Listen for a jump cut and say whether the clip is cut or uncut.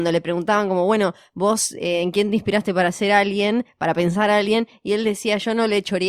uncut